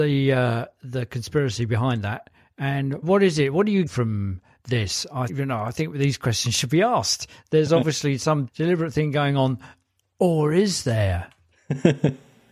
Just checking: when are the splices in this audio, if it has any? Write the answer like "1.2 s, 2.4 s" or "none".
3.0 s, 3.9 s, 5.3 s, 8.5 s